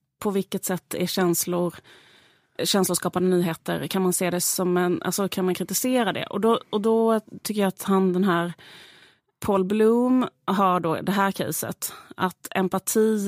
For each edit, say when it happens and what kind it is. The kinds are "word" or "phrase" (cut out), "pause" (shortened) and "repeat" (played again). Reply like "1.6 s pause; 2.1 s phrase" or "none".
3.9 s word